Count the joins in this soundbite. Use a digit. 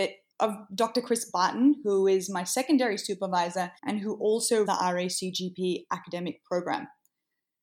2